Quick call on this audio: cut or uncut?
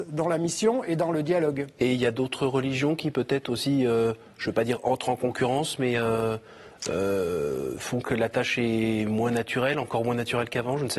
uncut